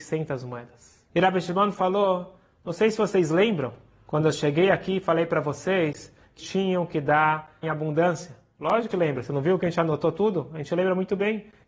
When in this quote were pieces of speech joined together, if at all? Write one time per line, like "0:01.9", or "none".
0:01.1
0:03.9
0:06.4
0:07.6
0:08.9